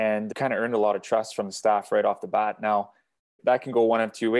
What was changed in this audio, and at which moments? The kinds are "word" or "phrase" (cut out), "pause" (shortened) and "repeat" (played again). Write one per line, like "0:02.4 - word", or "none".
none